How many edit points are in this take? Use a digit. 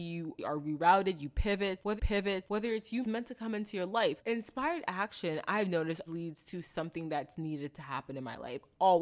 3